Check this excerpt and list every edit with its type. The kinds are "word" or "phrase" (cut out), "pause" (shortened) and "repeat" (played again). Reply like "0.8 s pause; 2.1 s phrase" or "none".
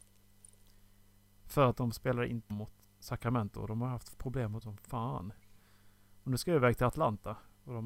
2.5 s word; 2.8 s word; 4.6 s word